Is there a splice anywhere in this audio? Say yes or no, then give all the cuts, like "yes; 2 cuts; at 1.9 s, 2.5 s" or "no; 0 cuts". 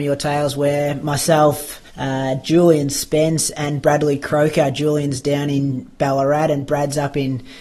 yes; 1 cut; at 1.9 s